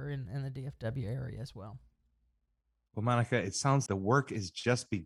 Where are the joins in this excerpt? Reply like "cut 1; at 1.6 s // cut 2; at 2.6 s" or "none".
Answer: cut 1; at 3.9 s